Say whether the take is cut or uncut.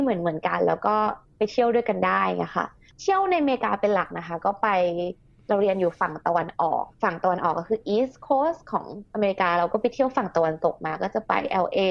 uncut